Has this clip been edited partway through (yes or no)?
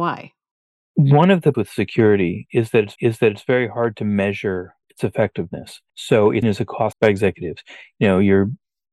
yes